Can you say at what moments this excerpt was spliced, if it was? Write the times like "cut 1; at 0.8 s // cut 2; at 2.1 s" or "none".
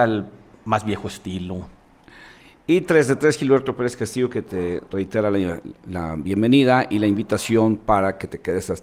none